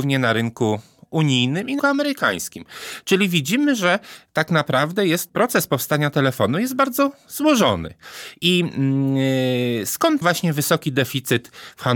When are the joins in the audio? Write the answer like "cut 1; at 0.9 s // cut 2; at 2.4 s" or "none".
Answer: cut 1; at 1.8 s // cut 2; at 5.3 s // cut 3; at 10.2 s